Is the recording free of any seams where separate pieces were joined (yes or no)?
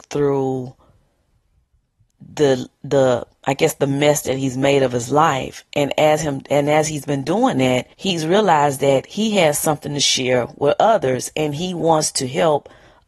no